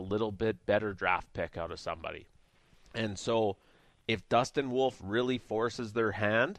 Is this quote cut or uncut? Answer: uncut